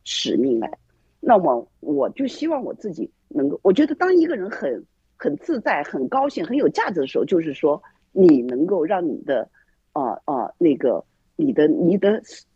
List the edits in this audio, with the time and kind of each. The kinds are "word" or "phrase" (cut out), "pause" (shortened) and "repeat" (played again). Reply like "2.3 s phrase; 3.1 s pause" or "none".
3.2 s pause; 10.2 s repeat